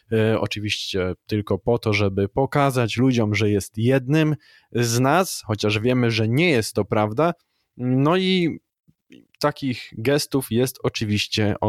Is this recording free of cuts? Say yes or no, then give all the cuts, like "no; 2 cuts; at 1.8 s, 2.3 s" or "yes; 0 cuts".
yes; 0 cuts